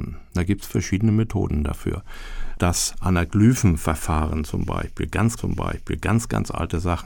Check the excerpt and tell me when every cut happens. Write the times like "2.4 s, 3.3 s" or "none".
5.4 s